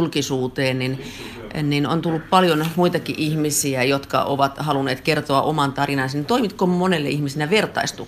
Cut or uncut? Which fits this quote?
uncut